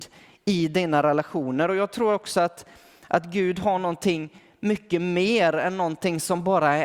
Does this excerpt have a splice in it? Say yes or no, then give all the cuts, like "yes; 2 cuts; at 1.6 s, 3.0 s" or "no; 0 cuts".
no; 0 cuts